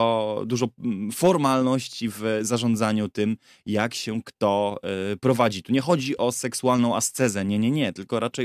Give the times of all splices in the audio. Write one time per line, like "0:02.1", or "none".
none